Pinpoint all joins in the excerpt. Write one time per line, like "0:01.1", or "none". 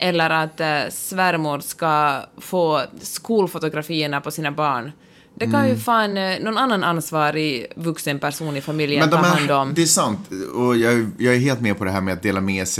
none